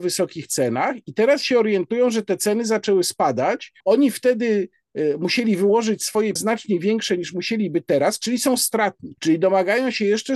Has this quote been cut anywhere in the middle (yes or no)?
yes